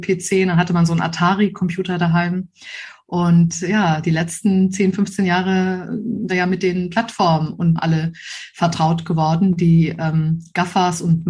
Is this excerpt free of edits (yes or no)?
no